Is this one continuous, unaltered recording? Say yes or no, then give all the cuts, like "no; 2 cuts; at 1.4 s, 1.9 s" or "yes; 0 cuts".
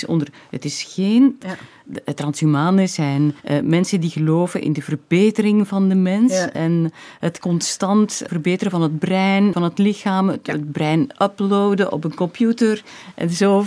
no; 4 cuts; at 1.4 s, 3.4 s, 8.3 s, 9.5 s